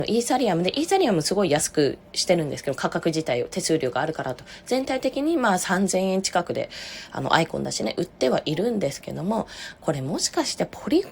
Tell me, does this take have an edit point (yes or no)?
no